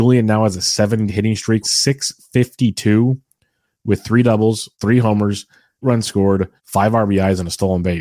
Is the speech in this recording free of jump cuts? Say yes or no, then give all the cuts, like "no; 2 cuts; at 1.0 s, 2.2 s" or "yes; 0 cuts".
no; 5 cuts; at 1.1 s, 1.6 s, 4.7 s, 5.8 s, 6.6 s